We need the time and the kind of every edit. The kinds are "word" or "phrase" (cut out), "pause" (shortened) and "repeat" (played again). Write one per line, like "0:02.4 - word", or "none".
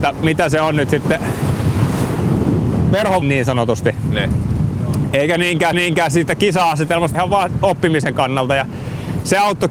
0:03.2 - phrase
0:05.7 - repeat
0:07.1 - word